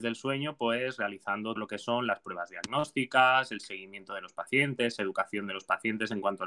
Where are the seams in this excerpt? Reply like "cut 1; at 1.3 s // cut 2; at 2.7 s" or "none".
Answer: cut 1; at 1.6 s